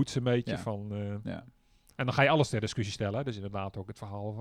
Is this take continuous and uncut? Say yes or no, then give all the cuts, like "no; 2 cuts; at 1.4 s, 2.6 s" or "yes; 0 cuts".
yes; 0 cuts